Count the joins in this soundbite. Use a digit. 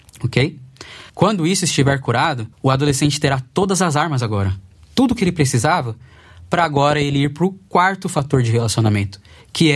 2